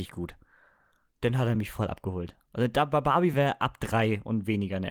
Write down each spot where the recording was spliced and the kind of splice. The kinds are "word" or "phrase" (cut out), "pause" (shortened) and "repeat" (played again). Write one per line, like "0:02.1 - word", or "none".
none